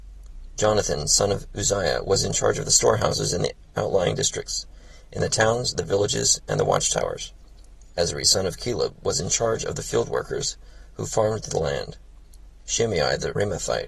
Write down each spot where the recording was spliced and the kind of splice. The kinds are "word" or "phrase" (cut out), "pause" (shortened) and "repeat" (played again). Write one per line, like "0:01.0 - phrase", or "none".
none